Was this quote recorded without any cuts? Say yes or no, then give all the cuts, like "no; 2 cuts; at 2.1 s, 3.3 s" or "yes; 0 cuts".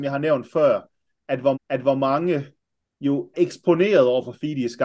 no; 2 cuts; at 1.5 s, 3.3 s